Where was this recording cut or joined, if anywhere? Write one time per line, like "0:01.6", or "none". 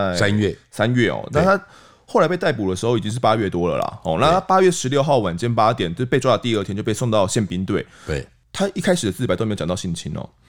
none